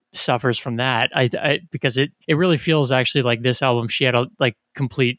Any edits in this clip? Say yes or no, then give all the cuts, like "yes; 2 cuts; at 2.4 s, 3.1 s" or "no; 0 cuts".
yes; 1 cut; at 2.2 s